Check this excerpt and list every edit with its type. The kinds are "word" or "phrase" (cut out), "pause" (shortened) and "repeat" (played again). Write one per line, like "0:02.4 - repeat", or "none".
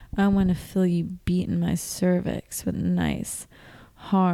0:02.7 - word